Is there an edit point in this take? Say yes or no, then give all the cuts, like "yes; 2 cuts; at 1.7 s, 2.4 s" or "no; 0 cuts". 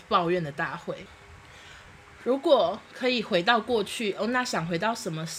no; 0 cuts